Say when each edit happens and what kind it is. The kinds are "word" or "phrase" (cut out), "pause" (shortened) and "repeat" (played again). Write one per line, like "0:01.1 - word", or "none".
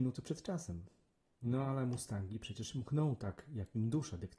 none